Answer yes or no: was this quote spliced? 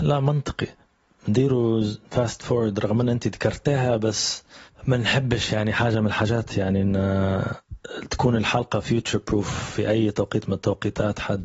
no